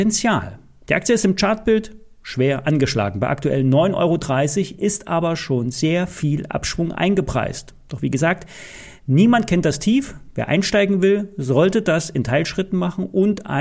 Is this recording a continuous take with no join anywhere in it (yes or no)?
yes